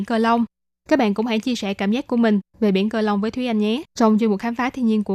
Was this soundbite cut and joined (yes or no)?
yes